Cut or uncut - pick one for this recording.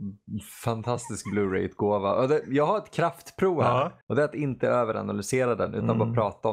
cut